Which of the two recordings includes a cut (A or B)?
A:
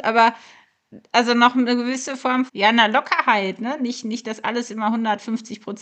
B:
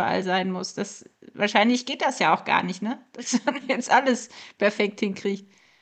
A